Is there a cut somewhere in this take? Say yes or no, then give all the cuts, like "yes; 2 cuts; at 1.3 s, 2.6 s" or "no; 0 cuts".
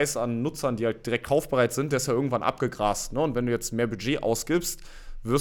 no; 0 cuts